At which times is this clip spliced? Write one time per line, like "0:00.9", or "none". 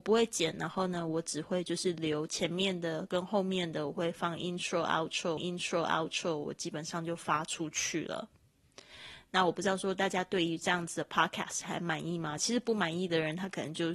0:05.4